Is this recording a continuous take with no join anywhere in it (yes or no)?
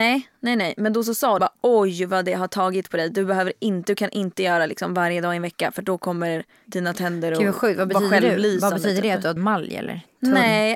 no